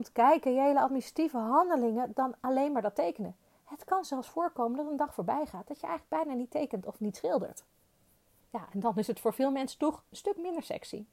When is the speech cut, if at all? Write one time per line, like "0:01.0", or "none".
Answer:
none